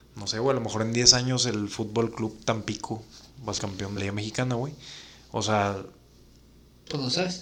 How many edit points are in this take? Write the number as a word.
two